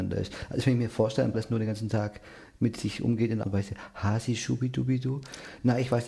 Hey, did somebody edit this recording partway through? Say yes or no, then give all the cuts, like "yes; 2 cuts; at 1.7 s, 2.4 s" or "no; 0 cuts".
yes; 2 cuts; at 1.3 s, 3.4 s